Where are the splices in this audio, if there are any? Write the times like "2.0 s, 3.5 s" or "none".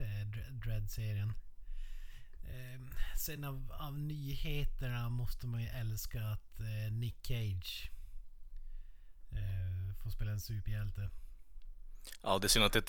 none